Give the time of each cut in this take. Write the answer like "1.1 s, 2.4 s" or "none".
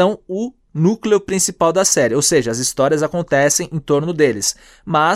none